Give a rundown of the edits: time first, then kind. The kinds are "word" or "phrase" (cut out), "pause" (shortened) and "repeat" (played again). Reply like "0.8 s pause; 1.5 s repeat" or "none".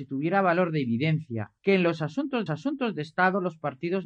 1.6 s pause; 2.5 s repeat